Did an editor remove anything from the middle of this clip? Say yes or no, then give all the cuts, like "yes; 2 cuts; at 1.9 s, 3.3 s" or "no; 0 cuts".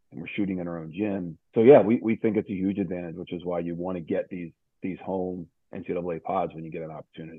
no; 0 cuts